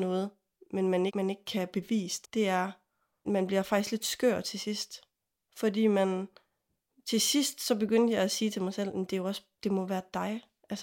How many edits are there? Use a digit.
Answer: 3